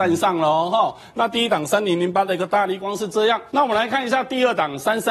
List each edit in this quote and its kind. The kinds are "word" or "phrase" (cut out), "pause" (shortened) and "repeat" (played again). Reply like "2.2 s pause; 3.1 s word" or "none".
3.5 s pause